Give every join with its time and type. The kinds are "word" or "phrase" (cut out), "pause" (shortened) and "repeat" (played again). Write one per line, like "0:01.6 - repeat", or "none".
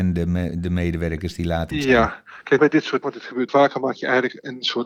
0:01.7 - word
0:02.6 - word
0:03.0 - word
0:03.5 - word